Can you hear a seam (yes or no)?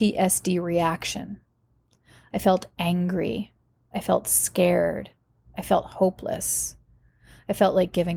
no